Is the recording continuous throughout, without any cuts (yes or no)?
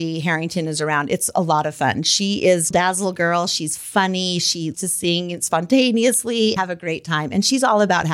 no